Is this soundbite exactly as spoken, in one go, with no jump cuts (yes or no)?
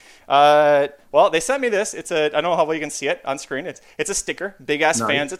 yes